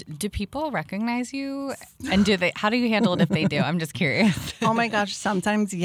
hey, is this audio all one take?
yes; 0 cuts

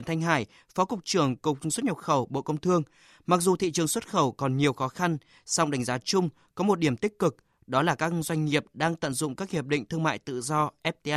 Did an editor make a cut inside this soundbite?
no; 0 cuts

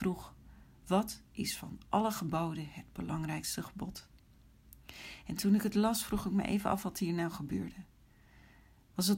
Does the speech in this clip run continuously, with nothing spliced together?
yes; 0 cuts

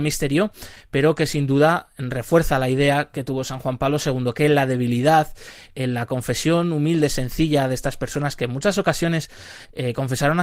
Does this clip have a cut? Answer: yes; 1 cut; at 5.7 s

